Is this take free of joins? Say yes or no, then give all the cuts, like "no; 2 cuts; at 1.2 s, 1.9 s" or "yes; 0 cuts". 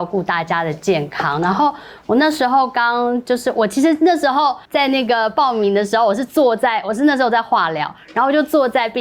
no; 1 cut; at 4.6 s